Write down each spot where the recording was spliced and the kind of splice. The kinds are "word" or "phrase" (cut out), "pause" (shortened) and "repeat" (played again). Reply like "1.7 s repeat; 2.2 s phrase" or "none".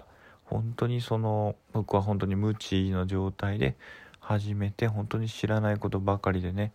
1.6 s pause

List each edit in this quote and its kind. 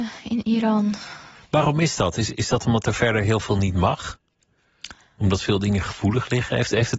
none

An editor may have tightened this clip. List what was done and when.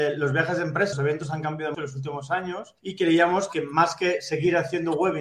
0.9 s word; 1.7 s word; 2.8 s pause

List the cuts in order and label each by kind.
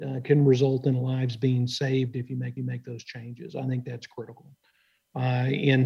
2.6 s repeat

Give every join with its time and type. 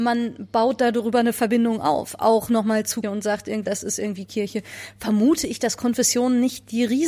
3.0 s word; 3.6 s word

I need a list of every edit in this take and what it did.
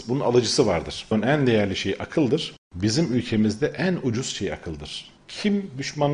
none

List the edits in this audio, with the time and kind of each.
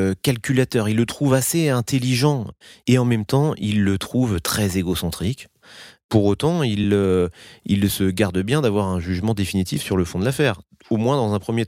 none

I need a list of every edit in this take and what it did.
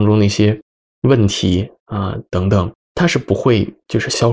2.8 s pause

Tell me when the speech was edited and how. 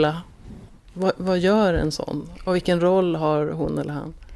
none

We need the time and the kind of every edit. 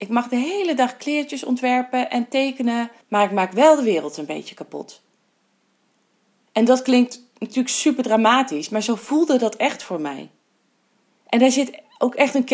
3.0 s pause

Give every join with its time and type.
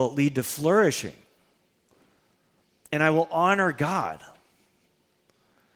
none

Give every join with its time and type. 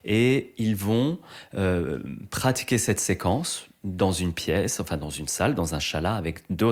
none

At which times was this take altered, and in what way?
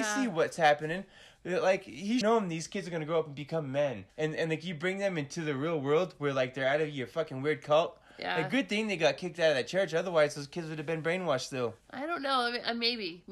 2.2 s phrase; 4.1 s pause; 11.8 s pause

